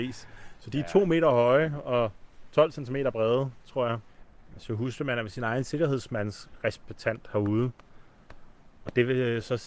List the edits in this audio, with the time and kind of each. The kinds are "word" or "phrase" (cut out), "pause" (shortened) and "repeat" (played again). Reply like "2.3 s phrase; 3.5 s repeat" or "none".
none